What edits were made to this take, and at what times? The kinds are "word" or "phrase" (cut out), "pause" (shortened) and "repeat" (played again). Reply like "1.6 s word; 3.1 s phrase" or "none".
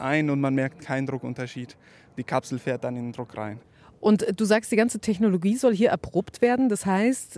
none